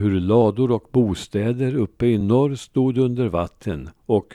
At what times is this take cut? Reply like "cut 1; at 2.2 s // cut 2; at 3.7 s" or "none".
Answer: none